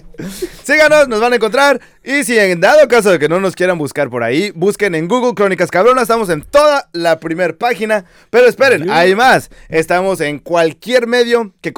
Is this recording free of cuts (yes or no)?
yes